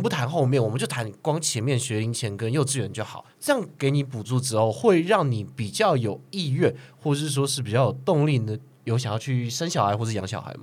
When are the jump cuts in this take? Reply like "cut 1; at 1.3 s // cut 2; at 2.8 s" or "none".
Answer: cut 1; at 3.3 s